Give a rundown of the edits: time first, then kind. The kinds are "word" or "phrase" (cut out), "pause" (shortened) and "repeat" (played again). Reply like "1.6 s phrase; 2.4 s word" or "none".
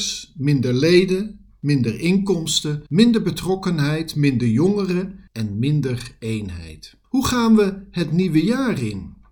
2.9 s pause; 5.3 s pause; 7.0 s pause